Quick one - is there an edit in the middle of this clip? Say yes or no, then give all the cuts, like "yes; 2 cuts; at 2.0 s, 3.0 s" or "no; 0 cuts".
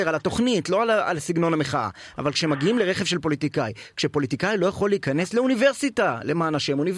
no; 0 cuts